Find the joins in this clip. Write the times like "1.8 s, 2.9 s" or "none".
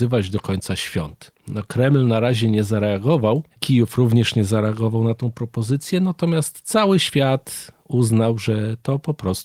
3.5 s